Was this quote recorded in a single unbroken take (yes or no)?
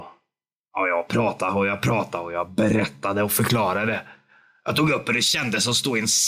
yes